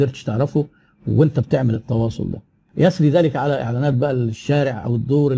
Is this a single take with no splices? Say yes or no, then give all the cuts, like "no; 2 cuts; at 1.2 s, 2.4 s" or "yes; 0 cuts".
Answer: yes; 0 cuts